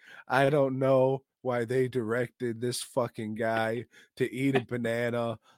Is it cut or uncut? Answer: uncut